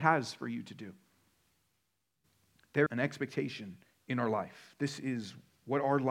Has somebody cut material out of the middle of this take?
yes; 2 cuts; at 2.9 s, 3.8 s

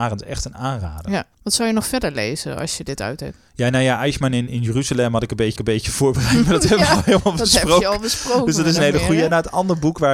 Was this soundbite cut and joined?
yes; 2 cuts; at 1.3 s, 5.6 s

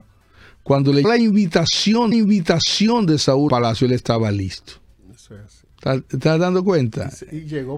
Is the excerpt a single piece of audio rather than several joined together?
no; 4 cuts; at 1.0 s, 2.1 s, 3.5 s, 5.7 s

